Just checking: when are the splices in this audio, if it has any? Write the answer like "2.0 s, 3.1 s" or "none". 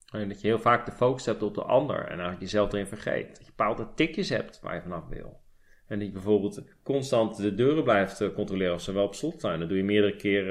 none